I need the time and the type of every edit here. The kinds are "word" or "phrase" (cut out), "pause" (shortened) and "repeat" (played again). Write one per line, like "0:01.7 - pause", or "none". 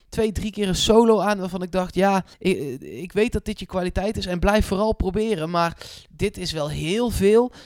0:02.3 - pause

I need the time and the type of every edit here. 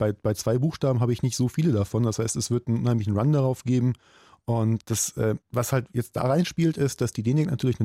0:04.8 - word
0:05.4 - pause

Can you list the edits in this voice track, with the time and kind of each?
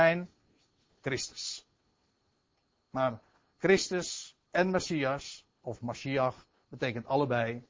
none

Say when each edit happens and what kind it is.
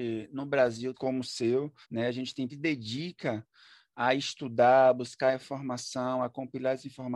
0:00.9 - phrase
0:01.8 - pause
0:02.5 - phrase

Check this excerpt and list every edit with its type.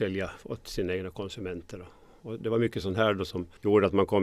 none

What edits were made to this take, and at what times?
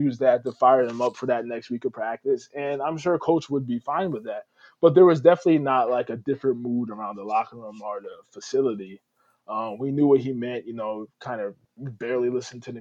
0:11.6 - pause

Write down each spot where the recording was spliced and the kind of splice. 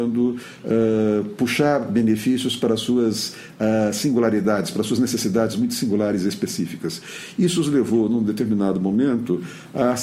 none

